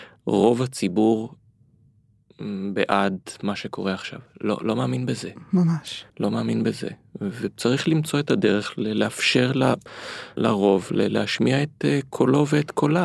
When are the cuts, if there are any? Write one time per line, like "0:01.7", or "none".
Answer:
0:06.1
0:10.4